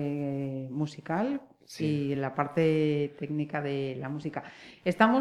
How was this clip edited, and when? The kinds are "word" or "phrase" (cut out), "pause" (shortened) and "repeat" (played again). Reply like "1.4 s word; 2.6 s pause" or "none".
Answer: none